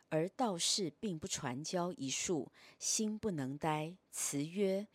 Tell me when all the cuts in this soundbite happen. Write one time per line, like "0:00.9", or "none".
none